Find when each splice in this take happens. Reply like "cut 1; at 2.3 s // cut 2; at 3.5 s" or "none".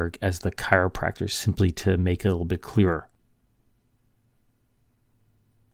none

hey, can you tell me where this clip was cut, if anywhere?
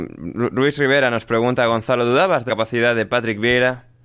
cut 1; at 2.5 s

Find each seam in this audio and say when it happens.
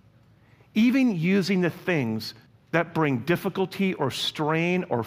cut 1; at 2.5 s

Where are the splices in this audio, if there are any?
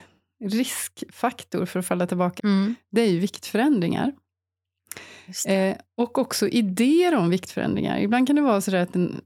cut 1; at 2.4 s

